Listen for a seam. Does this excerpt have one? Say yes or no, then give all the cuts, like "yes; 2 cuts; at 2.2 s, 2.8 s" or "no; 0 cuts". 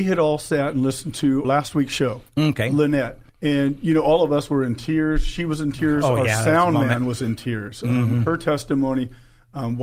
yes; 2 cuts; at 1.4 s, 3.3 s